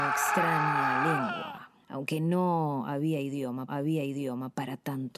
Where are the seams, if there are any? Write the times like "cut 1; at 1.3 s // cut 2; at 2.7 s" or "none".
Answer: cut 1; at 1.8 s // cut 2; at 3.7 s